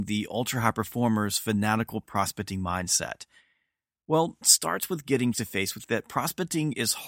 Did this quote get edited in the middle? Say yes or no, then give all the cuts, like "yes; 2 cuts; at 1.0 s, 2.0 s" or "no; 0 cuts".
yes; 3 cuts; at 4.4 s, 5.3 s, 5.8 s